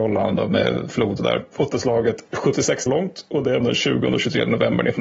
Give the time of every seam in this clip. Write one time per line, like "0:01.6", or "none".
0:01.2
0:01.7
0:02.9
0:03.6